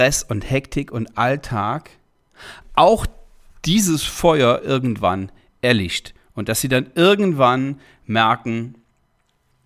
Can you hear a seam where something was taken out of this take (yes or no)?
no